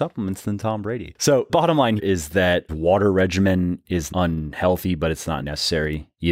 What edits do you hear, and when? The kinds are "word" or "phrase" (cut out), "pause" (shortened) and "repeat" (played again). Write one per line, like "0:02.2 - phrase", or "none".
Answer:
0:01.5 - word
0:02.0 - word
0:02.7 - word
0:04.1 - word
0:05.4 - word